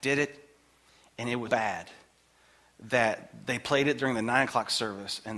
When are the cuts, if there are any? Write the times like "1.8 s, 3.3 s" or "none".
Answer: 1.5 s